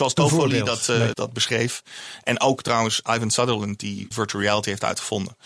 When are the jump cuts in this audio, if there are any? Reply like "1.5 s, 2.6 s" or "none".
1.1 s, 4.1 s